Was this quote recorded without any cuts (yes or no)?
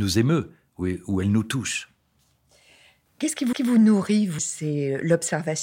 no